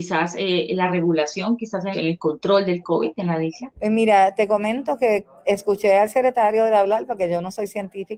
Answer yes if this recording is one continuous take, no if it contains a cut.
no